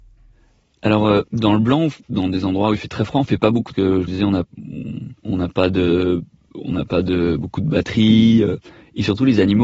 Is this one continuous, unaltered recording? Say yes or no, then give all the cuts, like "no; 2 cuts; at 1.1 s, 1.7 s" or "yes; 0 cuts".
no; 5 cuts; at 1.3 s, 2.0 s, 3.7 s, 4.1 s, 5.2 s